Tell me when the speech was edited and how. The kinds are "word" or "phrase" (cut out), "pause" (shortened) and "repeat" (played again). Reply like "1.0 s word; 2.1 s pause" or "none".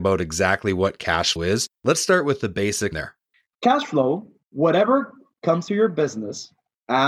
1.4 s word; 2.9 s phrase; 4.5 s word; 5.7 s word